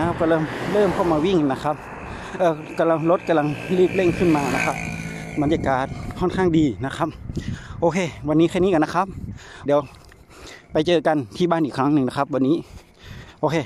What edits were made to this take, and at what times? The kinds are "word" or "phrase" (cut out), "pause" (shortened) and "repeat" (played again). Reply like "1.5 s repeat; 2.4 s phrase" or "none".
9.7 s phrase